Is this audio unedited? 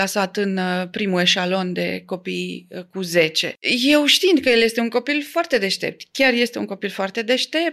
yes; 0 cuts

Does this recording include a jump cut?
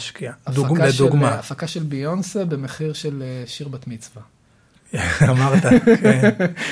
no; 0 cuts

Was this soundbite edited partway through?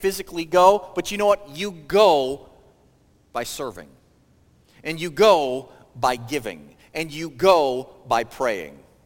no; 0 cuts

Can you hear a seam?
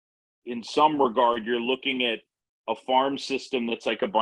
no; 0 cuts

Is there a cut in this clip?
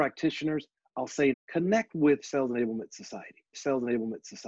yes; 2 cuts; at 1.3 s, 3.5 s

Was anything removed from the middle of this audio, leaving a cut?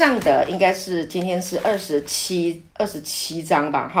yes; 1 cut; at 2.7 s

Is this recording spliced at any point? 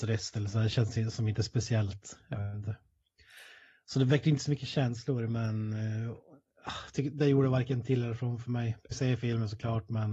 yes; 1 cut; at 8.9 s

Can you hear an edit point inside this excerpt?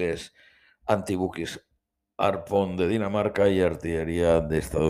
no; 0 cuts

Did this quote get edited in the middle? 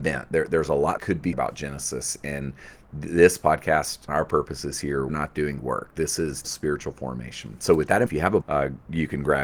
yes; 8 cuts; at 1.0 s, 1.3 s, 4.1 s, 5.1 s, 5.6 s, 6.4 s, 8.1 s, 8.4 s

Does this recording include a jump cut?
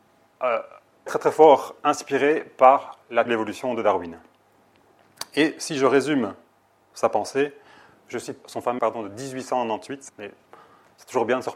yes; 5 cuts; at 1.1 s, 3.3 s, 8.4 s, 8.8 s, 10.1 s

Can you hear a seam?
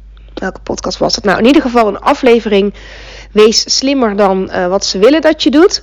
no; 0 cuts

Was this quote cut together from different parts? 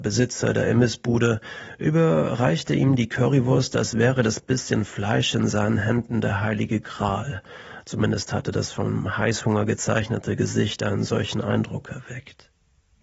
no; 0 cuts

